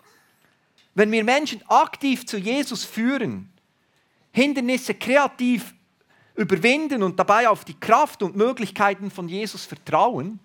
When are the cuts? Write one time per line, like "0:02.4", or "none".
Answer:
none